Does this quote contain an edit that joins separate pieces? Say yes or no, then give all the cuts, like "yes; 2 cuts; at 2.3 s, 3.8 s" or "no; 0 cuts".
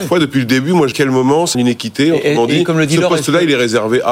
yes; 2 cuts; at 0.9 s, 1.5 s